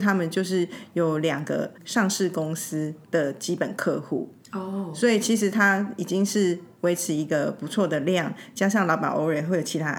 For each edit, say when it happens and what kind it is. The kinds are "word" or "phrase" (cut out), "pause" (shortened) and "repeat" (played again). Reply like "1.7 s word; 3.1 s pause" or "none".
1.8 s pause; 3.0 s pause